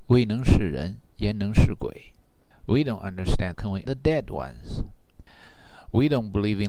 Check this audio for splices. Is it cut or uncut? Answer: cut